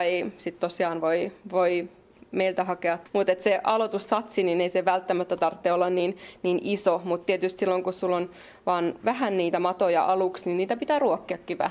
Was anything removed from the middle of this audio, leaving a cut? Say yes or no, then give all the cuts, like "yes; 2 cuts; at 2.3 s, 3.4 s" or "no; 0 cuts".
no; 0 cuts